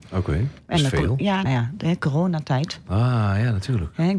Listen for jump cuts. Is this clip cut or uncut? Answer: cut